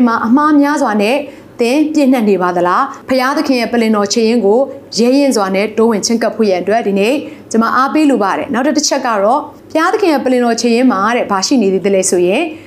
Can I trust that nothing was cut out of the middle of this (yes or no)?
no